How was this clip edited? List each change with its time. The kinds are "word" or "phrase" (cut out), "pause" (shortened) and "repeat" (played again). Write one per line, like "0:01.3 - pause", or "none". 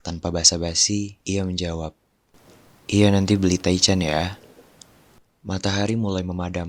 0:01.2 - pause
0:02.8 - pause
0:05.3 - pause